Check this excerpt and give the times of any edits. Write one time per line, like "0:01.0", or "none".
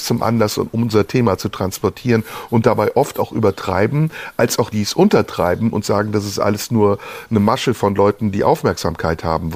0:04.7

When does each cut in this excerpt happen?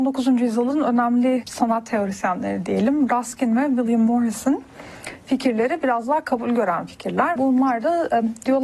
0:01.4
0:07.4

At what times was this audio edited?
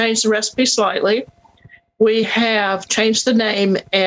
none

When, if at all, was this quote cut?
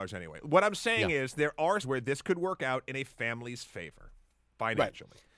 0:01.8

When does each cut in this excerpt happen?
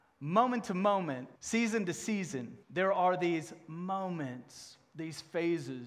0:01.4
0:02.6

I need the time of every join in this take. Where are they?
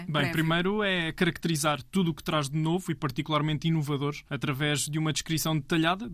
0:04.3

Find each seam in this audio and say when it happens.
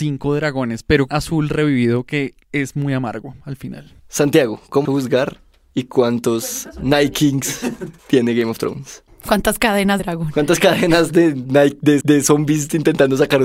0:01.1
0:02.4
0:04.0
0:04.8
0:08.0
0:10.0
0:12.0

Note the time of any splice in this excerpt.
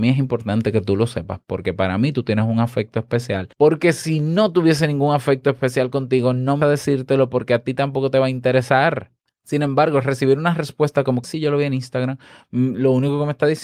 0:03.5
0:06.6
0:09.3
0:11.2

